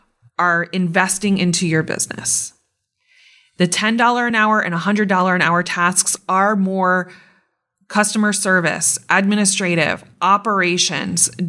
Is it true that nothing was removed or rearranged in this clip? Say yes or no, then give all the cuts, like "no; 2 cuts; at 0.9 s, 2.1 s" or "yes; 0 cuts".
yes; 0 cuts